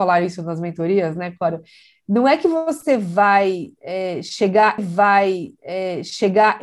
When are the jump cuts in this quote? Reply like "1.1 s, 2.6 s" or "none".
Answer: 4.8 s